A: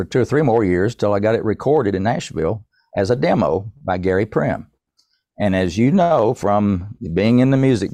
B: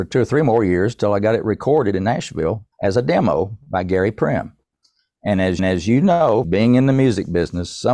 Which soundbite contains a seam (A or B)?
B